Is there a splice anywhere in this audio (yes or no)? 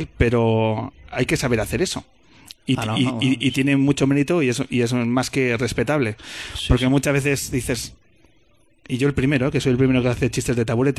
no